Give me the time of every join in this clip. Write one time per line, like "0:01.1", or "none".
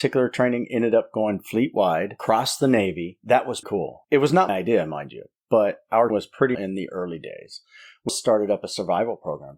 0:03.2
0:03.6
0:04.5
0:06.1
0:06.5
0:08.1